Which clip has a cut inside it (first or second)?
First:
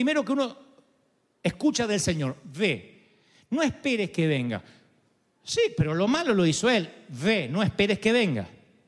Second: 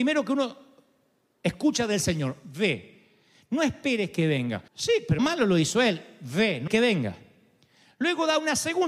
second